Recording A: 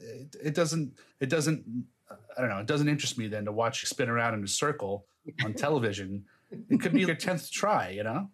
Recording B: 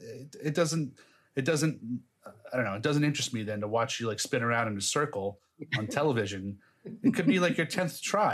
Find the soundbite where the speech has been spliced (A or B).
A